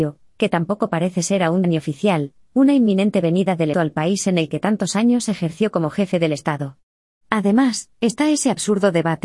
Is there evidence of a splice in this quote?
yes; 2 cuts; at 1.6 s, 3.7 s

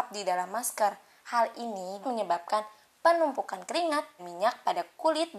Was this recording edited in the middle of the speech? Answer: yes; 2 cuts; at 2.0 s, 4.2 s

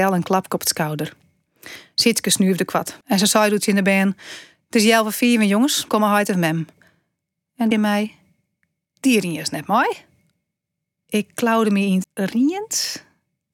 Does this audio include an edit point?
yes; 4 cuts; at 3.0 s, 5.9 s, 7.7 s, 12.0 s

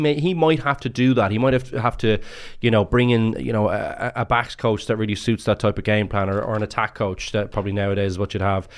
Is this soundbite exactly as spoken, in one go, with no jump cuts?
yes; 0 cuts

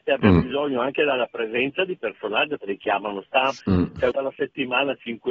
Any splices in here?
yes; 4 cuts; at 2.0 s, 2.6 s, 3.6 s, 4.1 s

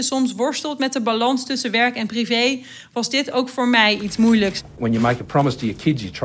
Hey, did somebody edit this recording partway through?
no; 0 cuts

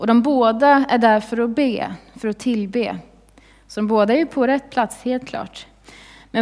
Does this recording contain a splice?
no; 0 cuts

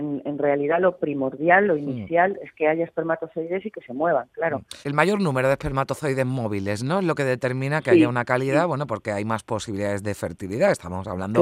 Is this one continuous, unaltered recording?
no; 1 cut; at 4.8 s

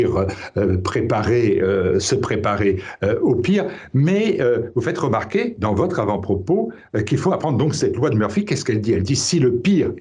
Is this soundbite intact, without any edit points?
yes; 0 cuts

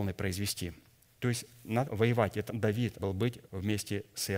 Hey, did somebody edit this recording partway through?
yes; 4 cuts; at 1.8 s, 2.5 s, 3.0 s, 3.4 s

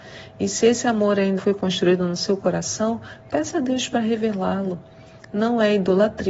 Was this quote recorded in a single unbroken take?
no; 1 cut; at 1.4 s

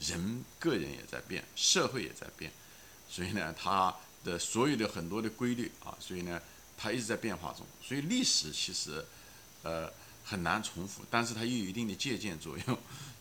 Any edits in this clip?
no; 0 cuts

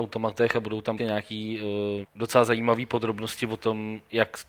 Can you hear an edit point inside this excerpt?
yes; 2 cuts; at 1.0 s, 2.0 s

